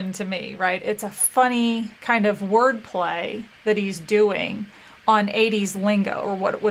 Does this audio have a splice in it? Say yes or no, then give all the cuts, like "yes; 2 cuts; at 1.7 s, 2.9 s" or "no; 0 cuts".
yes; 1 cut; at 2.0 s